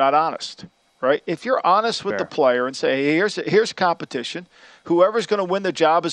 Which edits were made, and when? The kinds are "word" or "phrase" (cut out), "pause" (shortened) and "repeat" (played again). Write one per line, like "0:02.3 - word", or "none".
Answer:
none